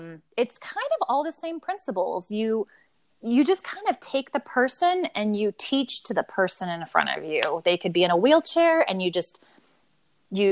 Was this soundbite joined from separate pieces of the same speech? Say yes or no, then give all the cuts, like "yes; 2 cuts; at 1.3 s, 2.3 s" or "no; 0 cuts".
no; 0 cuts